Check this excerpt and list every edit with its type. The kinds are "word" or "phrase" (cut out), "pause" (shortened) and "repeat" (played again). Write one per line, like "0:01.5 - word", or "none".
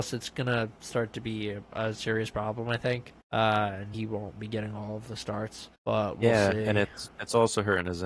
0:03.2 - pause
0:03.9 - word
0:05.7 - pause